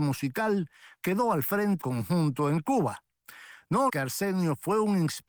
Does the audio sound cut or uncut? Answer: cut